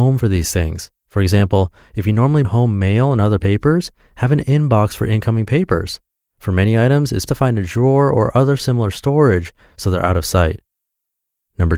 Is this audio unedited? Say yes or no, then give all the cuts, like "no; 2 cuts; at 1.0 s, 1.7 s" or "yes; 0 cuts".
no; 3 cuts; at 1.0 s, 2.4 s, 7.3 s